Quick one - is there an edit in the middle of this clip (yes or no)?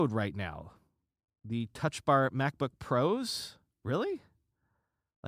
no